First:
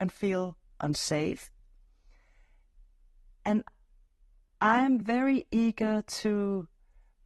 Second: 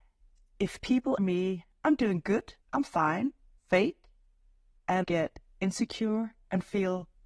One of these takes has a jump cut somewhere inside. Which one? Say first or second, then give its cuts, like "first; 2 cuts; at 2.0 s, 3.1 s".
second; 4 cuts; at 1.2 s, 2.6 s, 3.6 s, 5.0 s